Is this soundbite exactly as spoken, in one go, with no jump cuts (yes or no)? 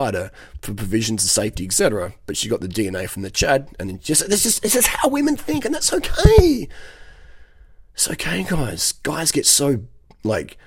yes